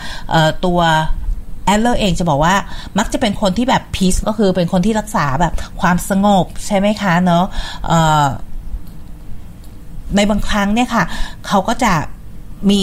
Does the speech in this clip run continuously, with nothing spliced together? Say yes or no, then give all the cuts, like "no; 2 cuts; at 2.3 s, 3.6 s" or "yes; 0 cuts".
no; 1 cut; at 4.2 s